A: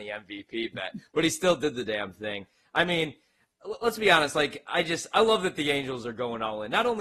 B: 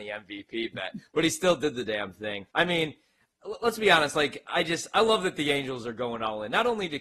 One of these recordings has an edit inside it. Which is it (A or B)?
B